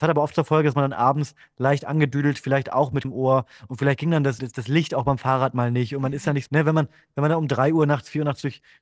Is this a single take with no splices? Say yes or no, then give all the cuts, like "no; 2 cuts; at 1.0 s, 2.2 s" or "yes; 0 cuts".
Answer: no; 3 cuts; at 3.0 s, 4.4 s, 6.5 s